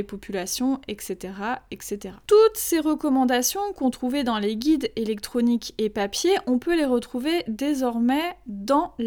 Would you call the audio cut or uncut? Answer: uncut